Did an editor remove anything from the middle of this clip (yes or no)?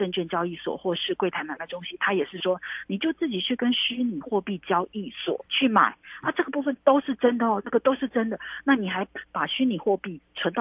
yes